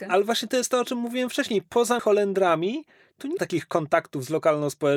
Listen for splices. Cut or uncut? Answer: cut